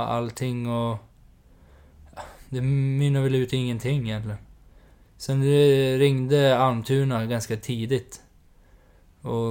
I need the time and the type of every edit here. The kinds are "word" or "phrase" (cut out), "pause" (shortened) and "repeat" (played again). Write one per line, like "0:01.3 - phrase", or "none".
none